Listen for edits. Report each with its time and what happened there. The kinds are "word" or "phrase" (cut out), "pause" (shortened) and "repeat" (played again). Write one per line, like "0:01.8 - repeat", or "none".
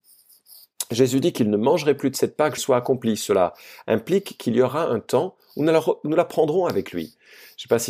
0:02.6 - phrase